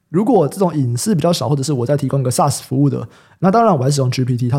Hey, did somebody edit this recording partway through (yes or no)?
no